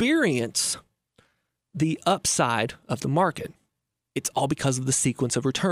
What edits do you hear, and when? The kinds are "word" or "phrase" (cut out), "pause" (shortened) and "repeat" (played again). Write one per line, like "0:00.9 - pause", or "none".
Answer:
none